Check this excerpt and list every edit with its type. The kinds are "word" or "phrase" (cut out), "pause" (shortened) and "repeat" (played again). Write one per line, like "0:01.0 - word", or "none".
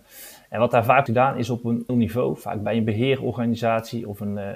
0:01.1 - word
0:01.9 - word